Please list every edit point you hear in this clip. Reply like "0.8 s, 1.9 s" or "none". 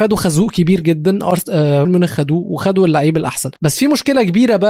1.8 s, 3.6 s